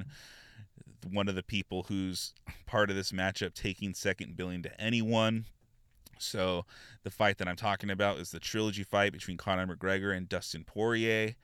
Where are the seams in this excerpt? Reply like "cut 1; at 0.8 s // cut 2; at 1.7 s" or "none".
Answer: none